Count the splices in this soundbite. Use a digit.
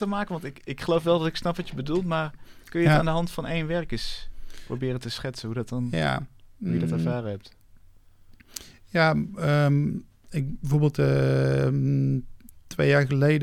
0